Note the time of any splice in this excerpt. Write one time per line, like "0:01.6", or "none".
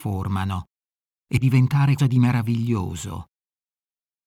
0:01.4
0:02.0